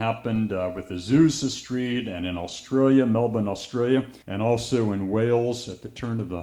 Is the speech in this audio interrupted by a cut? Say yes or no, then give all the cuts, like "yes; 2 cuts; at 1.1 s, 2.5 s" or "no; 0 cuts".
yes; 1 cut; at 4.2 s